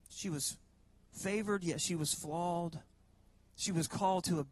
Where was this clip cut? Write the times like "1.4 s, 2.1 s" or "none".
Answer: none